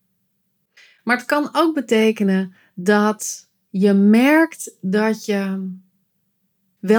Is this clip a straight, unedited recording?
yes; 0 cuts

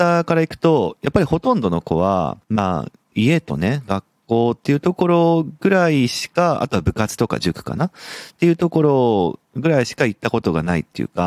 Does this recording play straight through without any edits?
no; 1 cut; at 2.4 s

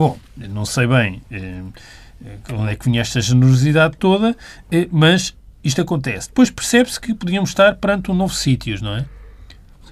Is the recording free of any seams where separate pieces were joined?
yes; 0 cuts

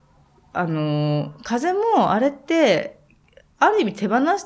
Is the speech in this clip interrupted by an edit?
no; 0 cuts

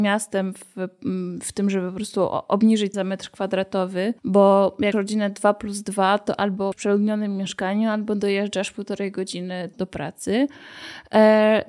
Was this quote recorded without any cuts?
no; 5 cuts; at 2.9 s, 4.2 s, 4.9 s, 6.7 s, 9.7 s

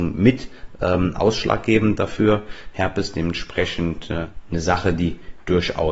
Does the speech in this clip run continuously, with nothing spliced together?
yes; 0 cuts

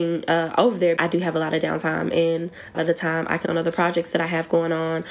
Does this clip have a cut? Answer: yes; 3 cuts; at 1.0 s, 2.7 s, 3.4 s

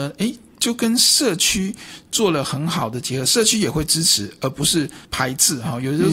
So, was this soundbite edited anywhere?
yes; 1 cut; at 5.0 s

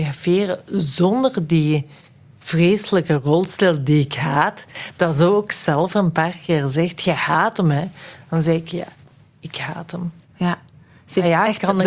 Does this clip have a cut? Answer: no; 0 cuts

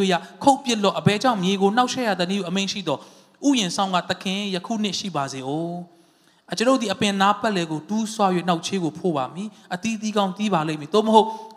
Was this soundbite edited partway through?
no; 0 cuts

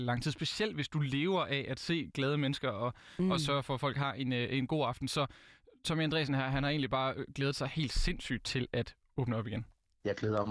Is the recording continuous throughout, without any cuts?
yes; 0 cuts

